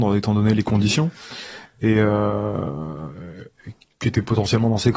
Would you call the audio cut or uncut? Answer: uncut